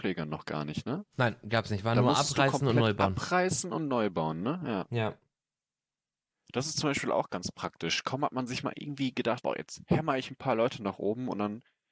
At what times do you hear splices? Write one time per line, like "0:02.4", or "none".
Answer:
0:09.4